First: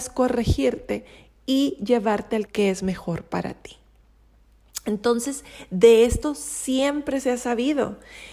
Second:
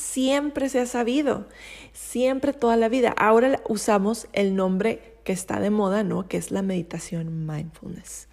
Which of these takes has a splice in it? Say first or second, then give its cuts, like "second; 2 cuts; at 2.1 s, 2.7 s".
first; 1 cut; at 2.5 s